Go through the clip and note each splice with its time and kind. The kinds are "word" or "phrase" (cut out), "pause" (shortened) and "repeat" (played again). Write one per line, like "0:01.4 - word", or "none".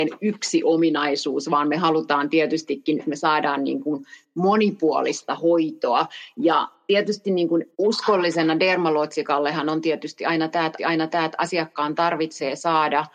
0:03.0 - word
0:07.7 - pause
0:10.8 - repeat

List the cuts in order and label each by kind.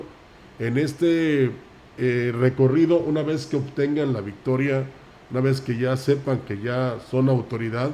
none

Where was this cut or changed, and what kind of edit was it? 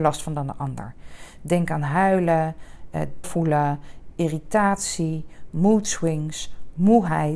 0:03.2 - word

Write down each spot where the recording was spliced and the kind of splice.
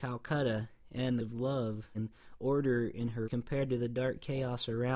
0:01.2 - phrase
0:01.9 - word
0:03.2 - word

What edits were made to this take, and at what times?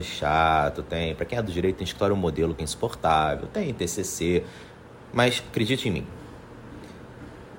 none

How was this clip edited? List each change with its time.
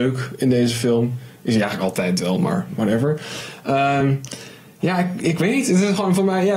none

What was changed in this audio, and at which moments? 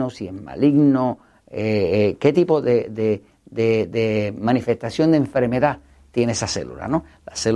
none

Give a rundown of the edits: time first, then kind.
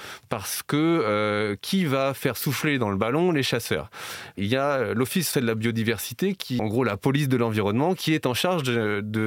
0:05.3 - word
0:06.6 - phrase

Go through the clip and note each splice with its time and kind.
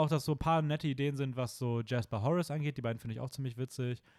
none

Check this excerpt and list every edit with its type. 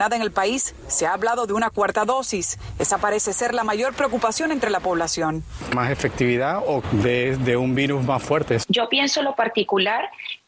0:05.7 - phrase
0:06.8 - phrase

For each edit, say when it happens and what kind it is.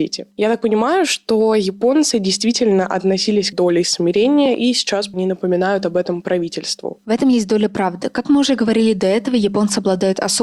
0:03.5 - phrase
0:05.1 - word

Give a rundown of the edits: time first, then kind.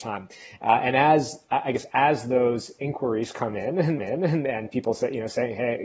0:04.0 - repeat

